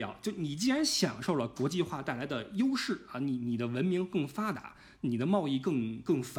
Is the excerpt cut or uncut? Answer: uncut